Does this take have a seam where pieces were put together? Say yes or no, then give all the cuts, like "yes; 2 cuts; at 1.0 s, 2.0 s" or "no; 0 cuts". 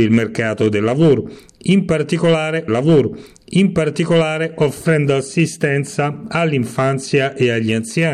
yes; 1 cut; at 2.7 s